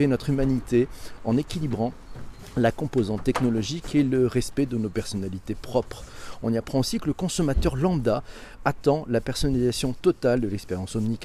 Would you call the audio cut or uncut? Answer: uncut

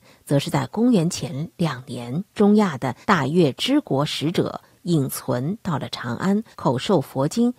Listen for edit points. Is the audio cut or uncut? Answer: cut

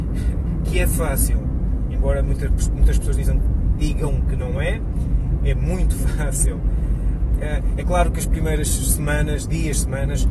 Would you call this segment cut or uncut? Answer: uncut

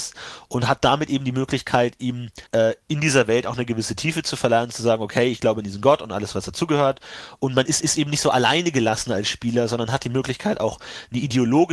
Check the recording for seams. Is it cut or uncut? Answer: cut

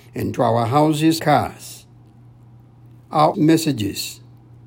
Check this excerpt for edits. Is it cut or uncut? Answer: cut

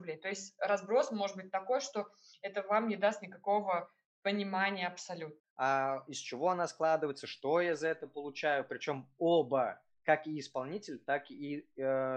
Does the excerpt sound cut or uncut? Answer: uncut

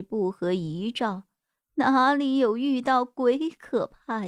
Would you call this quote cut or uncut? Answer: uncut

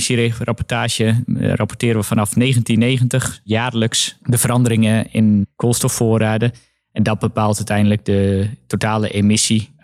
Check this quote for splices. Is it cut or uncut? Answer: uncut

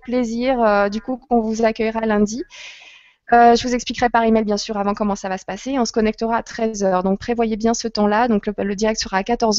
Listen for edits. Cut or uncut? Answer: uncut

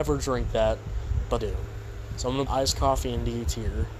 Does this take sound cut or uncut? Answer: cut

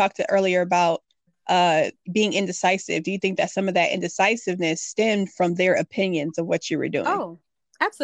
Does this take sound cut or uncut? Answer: cut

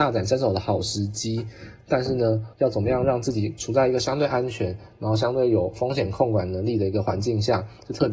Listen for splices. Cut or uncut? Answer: cut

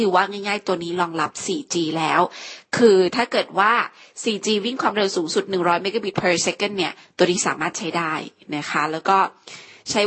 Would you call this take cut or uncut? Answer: uncut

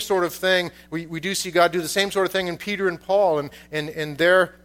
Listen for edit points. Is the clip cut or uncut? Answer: uncut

